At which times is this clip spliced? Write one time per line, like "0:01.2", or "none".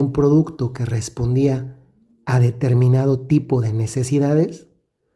none